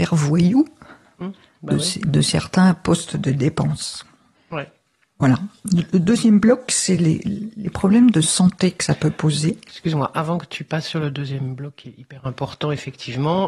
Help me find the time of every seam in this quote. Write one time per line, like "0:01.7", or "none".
none